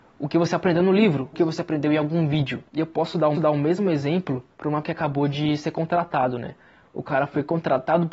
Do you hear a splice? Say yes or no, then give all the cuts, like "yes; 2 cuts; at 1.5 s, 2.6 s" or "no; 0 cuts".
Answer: yes; 5 cuts; at 1.3 s, 2.7 s, 3.3 s, 4.5 s, 4.8 s